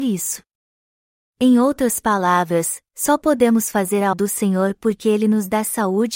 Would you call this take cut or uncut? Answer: cut